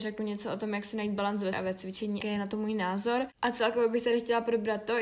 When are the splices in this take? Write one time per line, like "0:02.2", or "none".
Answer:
0:01.5
0:02.2

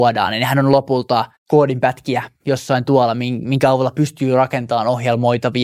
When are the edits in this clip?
0:01.4

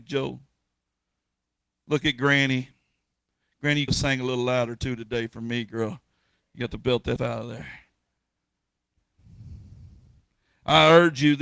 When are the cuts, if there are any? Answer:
0:03.9
0:07.2

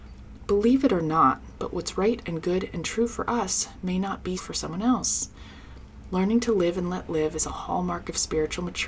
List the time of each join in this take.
0:04.4

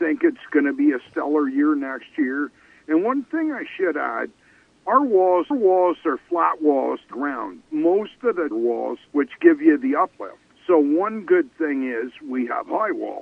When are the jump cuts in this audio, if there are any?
0:05.5
0:07.1
0:08.5
0:09.1
0:10.5

